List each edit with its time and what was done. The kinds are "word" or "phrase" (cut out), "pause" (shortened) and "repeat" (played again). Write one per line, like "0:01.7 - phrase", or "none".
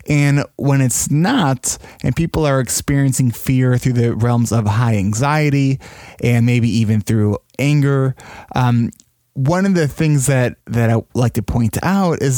none